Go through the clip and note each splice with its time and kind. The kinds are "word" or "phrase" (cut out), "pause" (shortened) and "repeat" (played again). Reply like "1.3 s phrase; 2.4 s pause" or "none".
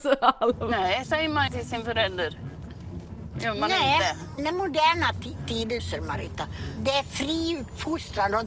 1.0 s word; 1.5 s word; 4.4 s word; 5.8 s word